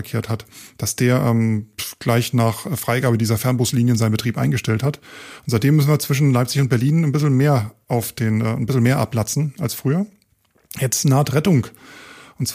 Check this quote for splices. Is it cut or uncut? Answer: uncut